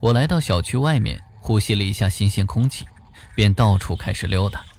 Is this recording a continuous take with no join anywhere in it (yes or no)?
no